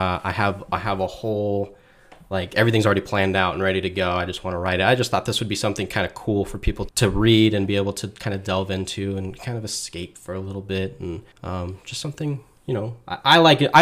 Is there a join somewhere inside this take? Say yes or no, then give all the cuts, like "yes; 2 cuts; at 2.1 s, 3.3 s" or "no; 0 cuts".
yes; 2 cuts; at 6.9 s, 11.3 s